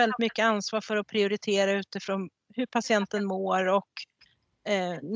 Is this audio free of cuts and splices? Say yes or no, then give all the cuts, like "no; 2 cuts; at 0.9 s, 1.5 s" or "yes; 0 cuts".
yes; 0 cuts